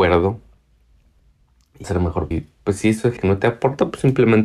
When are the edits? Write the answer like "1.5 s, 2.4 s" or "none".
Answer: 1.8 s, 2.3 s, 3.2 s